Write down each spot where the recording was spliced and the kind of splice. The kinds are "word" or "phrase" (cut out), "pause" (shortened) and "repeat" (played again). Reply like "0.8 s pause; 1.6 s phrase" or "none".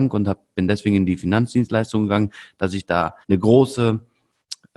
3.2 s pause